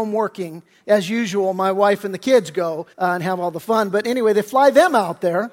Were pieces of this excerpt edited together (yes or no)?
yes